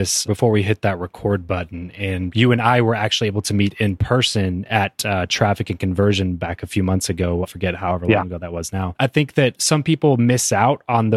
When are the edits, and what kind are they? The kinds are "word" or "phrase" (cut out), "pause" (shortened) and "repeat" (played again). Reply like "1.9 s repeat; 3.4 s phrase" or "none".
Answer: none